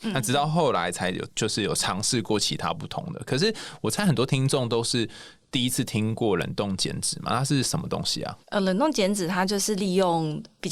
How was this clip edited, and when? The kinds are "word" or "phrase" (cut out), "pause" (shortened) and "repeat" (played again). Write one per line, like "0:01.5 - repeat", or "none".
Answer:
0:08.4 - pause